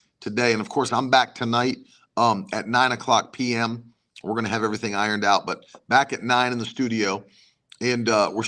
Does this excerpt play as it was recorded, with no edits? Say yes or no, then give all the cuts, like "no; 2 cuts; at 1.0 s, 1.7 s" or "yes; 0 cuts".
yes; 0 cuts